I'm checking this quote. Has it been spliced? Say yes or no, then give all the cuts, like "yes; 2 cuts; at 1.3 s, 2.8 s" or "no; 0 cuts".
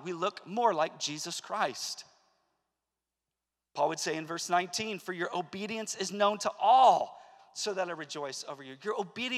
no; 0 cuts